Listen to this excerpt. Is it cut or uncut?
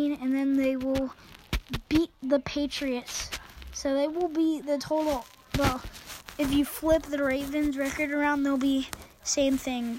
uncut